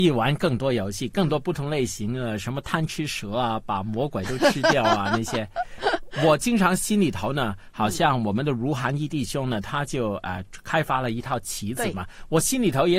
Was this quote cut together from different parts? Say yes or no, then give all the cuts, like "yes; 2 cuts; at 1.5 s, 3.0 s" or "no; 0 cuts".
no; 0 cuts